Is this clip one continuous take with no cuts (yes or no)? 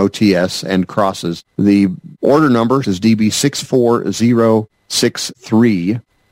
no